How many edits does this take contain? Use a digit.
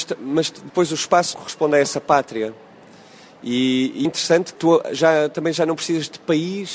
3